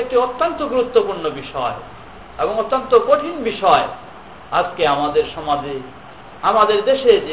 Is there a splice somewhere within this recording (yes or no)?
no